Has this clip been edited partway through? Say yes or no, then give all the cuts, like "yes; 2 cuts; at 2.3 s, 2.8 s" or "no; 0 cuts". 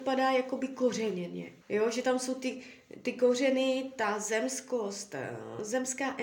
yes; 1 cut; at 1.6 s